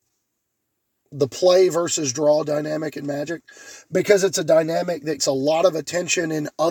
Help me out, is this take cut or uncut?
cut